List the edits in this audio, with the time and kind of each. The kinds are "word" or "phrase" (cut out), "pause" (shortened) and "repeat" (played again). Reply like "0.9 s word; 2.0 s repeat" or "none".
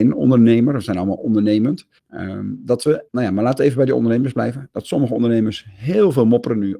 2.0 s pause; 3.1 s pause